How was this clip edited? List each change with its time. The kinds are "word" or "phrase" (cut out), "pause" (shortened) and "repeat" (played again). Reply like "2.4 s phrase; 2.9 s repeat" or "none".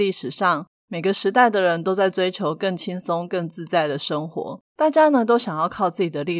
4.6 s pause